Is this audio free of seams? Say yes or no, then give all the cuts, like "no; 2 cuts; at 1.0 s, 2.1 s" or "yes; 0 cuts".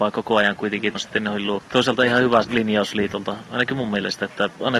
no; 3 cuts; at 0.9 s, 1.7 s, 2.4 s